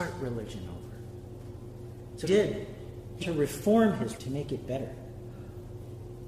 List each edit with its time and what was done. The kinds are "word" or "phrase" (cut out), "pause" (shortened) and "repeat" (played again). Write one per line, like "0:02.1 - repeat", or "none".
0:02.2 - word
0:03.2 - word
0:04.2 - word